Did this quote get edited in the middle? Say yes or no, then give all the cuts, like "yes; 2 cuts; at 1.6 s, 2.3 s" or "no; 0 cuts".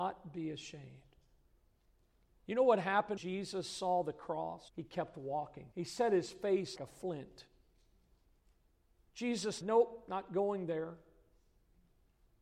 yes; 5 cuts; at 3.2 s, 4.7 s, 5.7 s, 6.8 s, 9.6 s